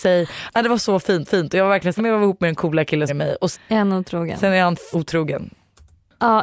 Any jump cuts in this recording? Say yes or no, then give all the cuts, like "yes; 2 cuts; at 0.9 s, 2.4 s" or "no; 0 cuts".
yes; 5 cuts; at 1.2 s, 2.0 s, 3.1 s, 3.5 s, 4.9 s